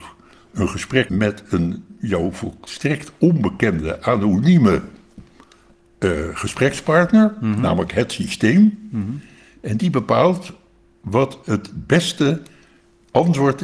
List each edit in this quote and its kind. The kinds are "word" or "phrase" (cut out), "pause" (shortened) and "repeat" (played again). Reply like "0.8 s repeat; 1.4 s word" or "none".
1.1 s word